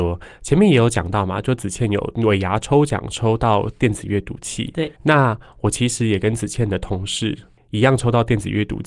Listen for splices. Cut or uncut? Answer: cut